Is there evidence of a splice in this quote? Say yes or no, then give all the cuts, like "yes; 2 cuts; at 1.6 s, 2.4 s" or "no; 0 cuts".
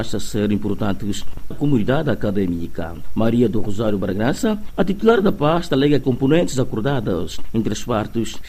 yes; 2 cuts; at 1.5 s, 6.0 s